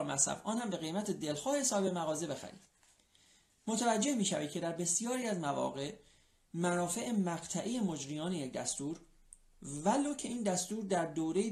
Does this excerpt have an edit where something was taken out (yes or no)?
no